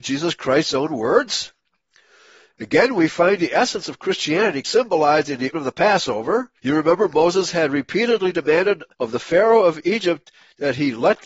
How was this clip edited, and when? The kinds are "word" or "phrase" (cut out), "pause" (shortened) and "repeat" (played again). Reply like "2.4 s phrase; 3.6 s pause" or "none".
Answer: 4.6 s word; 5.5 s word; 6.6 s pause; 8.9 s pause

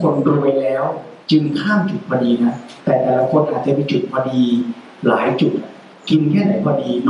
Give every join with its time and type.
1.2 s pause; 2.8 s pause; 5.9 s pause

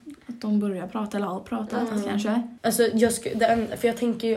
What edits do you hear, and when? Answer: 2.6 s pause

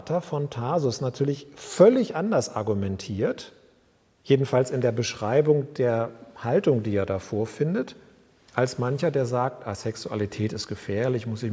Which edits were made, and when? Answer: none

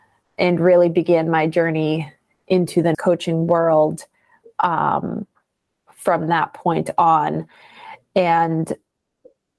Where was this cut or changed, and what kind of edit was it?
2.9 s word

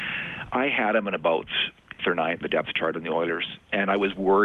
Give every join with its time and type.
2.0 s word; 2.4 s word

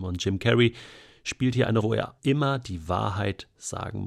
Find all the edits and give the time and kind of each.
1.8 s word; 2.2 s word

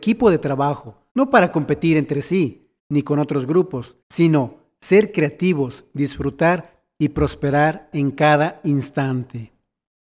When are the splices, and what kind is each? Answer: 1.1 s pause; 2.8 s pause; 4.0 s pause

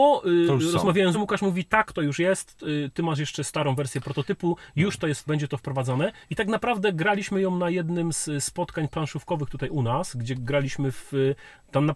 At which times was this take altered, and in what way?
1.1 s word; 5.3 s word; 6.2 s pause

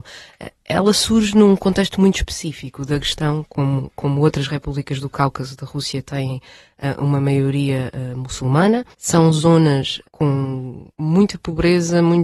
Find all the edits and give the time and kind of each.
8.9 s pause; 10.9 s pause

